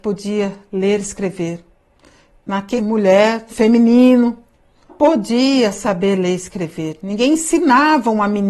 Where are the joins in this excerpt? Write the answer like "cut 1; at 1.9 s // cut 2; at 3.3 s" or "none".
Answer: cut 1; at 2.8 s // cut 2; at 3.5 s // cut 3; at 4.9 s